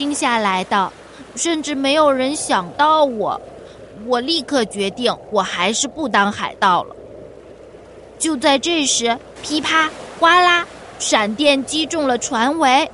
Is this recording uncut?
no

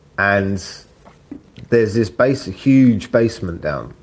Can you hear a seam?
no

